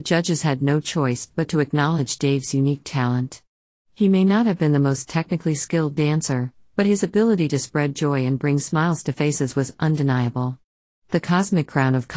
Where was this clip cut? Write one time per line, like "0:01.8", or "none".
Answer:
none